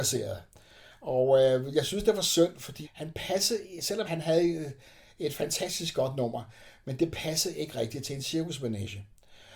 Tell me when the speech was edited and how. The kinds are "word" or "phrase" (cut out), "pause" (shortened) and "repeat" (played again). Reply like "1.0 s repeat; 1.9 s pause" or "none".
2.8 s word; 4.1 s word